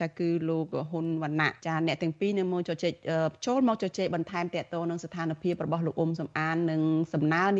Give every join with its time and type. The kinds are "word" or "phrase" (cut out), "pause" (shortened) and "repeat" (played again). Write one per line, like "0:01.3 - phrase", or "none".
0:01.6 - pause